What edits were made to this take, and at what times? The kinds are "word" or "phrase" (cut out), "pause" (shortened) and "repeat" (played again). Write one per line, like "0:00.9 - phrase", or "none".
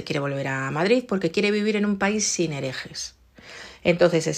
none